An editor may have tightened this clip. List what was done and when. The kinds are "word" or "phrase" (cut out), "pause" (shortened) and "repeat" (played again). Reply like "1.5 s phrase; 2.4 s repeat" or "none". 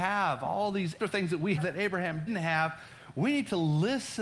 1.0 s word; 1.6 s word; 2.3 s word